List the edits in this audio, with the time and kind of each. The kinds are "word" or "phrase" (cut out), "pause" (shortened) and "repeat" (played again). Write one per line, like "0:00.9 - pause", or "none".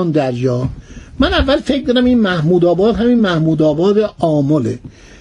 none